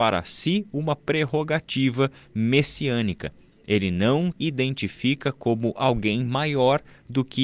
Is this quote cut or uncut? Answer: cut